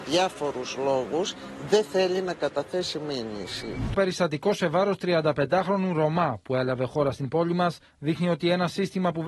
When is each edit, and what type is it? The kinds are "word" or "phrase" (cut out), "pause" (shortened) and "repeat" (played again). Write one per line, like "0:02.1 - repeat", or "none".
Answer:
0:03.9 - word